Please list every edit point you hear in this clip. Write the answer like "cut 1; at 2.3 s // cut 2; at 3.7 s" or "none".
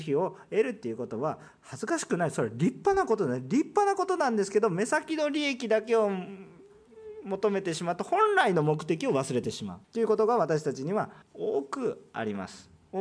cut 1; at 9.8 s // cut 2; at 11.2 s